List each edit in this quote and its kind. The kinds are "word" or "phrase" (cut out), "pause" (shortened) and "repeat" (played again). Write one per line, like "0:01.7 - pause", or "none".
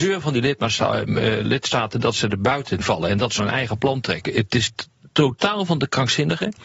0:02.8 - word
0:03.4 - word